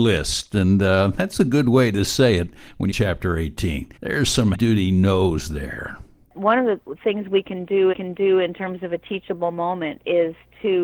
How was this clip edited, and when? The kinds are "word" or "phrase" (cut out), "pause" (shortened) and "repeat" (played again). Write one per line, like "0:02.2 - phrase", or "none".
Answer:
0:02.9 - phrase
0:04.0 - pause
0:04.5 - word
0:07.9 - repeat